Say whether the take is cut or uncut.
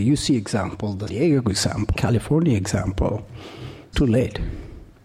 cut